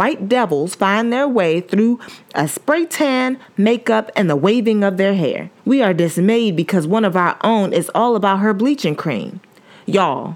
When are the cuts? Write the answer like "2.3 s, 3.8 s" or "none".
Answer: 5.6 s